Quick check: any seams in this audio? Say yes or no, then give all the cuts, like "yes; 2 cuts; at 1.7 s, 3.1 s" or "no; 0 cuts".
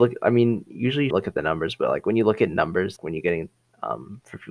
yes; 2 cuts; at 1.1 s, 3.0 s